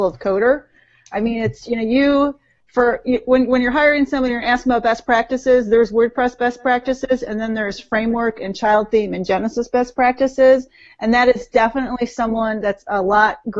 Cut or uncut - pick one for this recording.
uncut